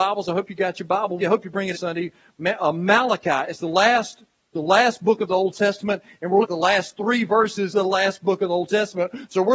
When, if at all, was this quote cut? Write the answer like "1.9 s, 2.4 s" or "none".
1.2 s, 1.7 s, 4.5 s, 6.4 s, 7.7 s

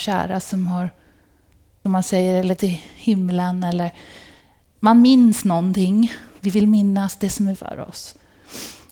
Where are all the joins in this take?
1.8 s, 2.6 s, 7.5 s

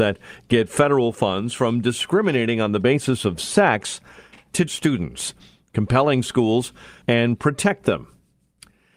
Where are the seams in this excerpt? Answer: 4.7 s, 7.0 s

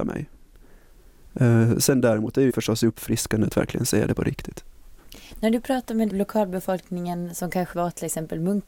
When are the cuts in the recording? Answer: 2.5 s, 6.1 s, 7.7 s

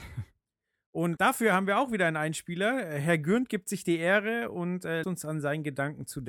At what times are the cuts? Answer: 1.2 s, 5.0 s

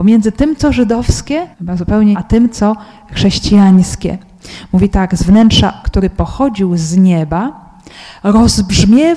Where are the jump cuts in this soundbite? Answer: 1.5 s, 2.1 s, 5.8 s

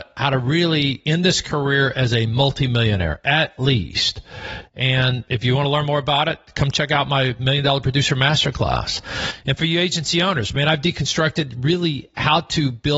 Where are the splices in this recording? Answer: 5.3 s

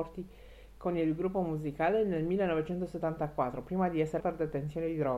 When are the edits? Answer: 4.2 s

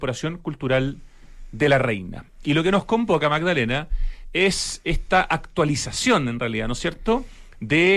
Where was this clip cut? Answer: none

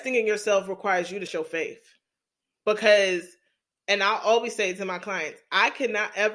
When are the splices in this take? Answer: 1.3 s

